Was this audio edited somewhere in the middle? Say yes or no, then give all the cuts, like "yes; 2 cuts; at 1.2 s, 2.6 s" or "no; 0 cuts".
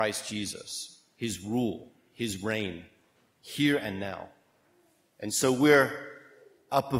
no; 0 cuts